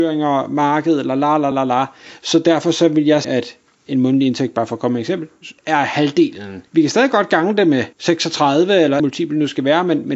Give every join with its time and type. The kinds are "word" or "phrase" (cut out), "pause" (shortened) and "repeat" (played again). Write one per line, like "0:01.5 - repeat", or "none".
0:01.5 - word
0:03.2 - word
0:05.6 - pause
0:06.7 - pause
0:07.9 - pause
0:09.0 - phrase